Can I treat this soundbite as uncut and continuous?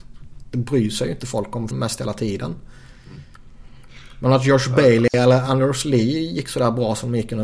no; 1 cut; at 1.7 s

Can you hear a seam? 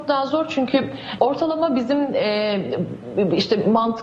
yes; 1 cut; at 1.2 s

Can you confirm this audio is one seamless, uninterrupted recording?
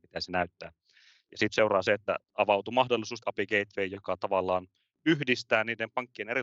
no; 3 cuts; at 1.5 s, 2.2 s, 3.2 s

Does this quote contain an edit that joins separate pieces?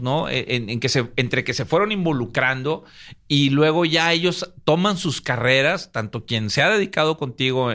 no; 0 cuts

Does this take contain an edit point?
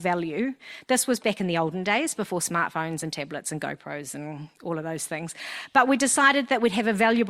no; 0 cuts

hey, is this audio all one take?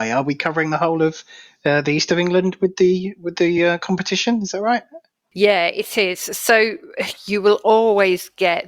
yes; 0 cuts

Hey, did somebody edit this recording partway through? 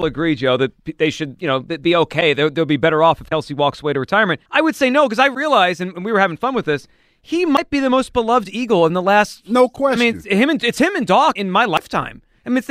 yes; 2 cuts; at 4.5 s, 11.4 s

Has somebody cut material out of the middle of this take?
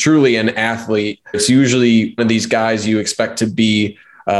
yes; 2 cuts; at 1.3 s, 2.2 s

